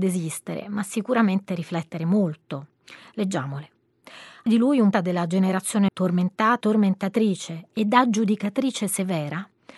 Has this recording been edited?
yes; 4 cuts; at 4.5 s, 4.9 s, 5.9 s, 6.6 s

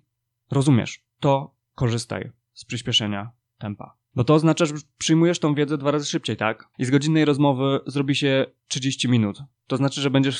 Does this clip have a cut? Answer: yes; 2 cuts; at 6.7 s, 8.6 s

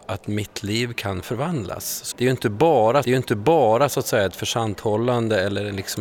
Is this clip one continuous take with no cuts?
no; 2 cuts; at 2.1 s, 3.0 s

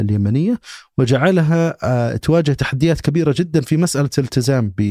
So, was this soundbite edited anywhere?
no; 0 cuts

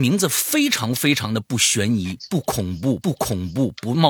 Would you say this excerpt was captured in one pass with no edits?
no; 1 cut; at 3.0 s

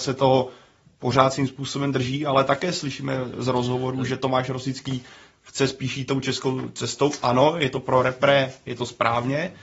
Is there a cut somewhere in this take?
no; 0 cuts

